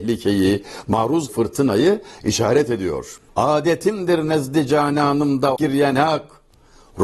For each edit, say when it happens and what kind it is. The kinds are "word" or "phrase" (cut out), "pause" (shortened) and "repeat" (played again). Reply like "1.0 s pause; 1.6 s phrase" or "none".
1.3 s word; 3.3 s pause; 5.6 s word